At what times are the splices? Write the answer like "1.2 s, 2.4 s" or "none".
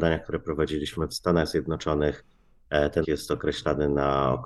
1.1 s, 3.0 s